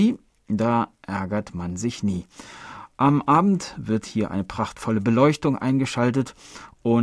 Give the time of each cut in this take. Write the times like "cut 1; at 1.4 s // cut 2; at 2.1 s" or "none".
none